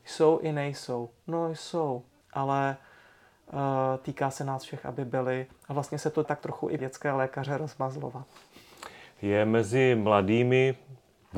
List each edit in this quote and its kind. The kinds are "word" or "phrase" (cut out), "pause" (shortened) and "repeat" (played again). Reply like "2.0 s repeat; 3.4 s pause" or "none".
2.2 s pause; 6.2 s word; 6.8 s phrase

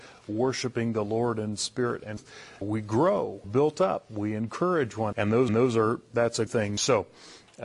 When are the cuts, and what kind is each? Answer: 2.6 s word; 3.4 s word; 5.1 s word; 5.5 s repeat; 6.5 s word

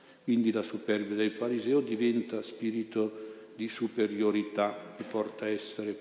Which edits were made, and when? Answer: 5.0 s phrase

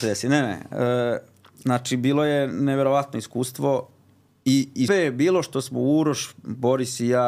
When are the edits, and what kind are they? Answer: 4.9 s word

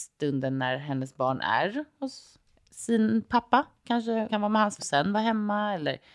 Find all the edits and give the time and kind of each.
2.4 s pause; 4.3 s word; 4.8 s word

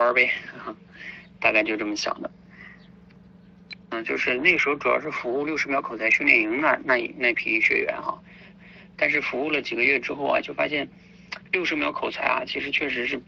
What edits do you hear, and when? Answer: 3.8 s pause; 8.5 s repeat

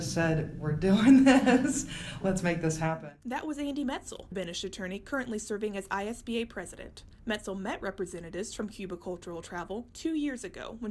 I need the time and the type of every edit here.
4.3 s word

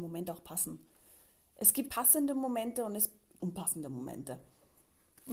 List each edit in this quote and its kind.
1.9 s word; 3.4 s phrase

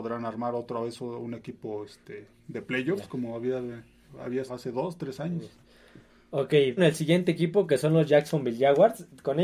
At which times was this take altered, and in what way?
2.4 s pause; 4.5 s word; 6.8 s phrase

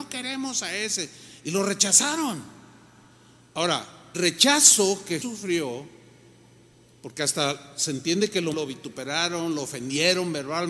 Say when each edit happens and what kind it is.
4.1 s word; 5.2 s word; 8.5 s word

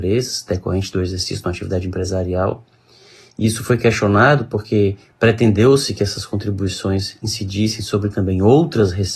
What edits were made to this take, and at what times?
none

